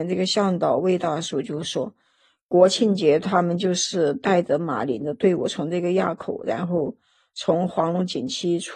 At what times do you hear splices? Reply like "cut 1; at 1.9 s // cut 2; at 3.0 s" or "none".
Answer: none